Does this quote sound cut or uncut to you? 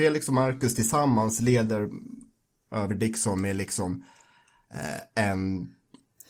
uncut